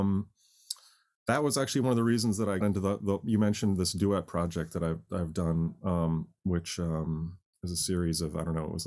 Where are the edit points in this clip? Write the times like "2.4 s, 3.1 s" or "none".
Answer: 2.6 s